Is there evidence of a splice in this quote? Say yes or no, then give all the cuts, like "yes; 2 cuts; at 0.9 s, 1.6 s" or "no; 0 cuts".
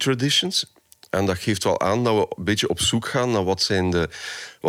no; 0 cuts